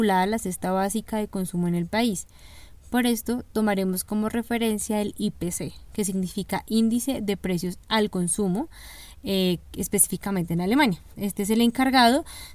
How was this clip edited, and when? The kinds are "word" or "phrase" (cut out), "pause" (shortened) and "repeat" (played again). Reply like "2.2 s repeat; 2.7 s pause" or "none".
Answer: 7.8 s pause